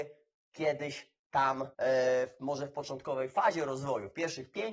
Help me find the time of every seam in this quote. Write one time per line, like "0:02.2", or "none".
0:01.7